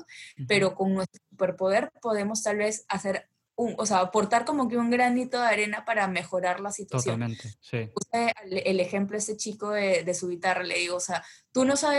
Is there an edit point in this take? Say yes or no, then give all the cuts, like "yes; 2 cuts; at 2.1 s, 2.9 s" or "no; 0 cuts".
no; 0 cuts